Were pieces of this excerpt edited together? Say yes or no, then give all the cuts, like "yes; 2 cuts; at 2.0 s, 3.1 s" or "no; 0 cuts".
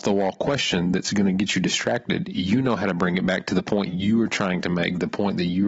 no; 0 cuts